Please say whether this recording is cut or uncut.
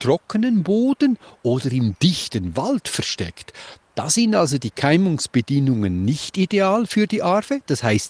uncut